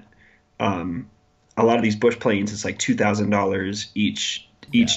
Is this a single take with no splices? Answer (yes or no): yes